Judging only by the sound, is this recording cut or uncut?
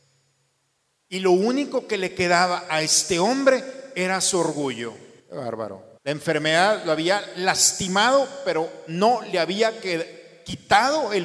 cut